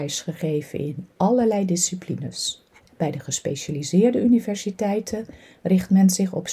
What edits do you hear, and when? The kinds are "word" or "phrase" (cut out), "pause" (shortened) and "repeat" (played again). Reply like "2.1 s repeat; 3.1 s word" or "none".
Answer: 2.8 s pause